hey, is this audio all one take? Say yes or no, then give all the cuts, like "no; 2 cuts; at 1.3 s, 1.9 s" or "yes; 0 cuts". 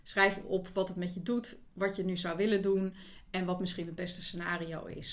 yes; 0 cuts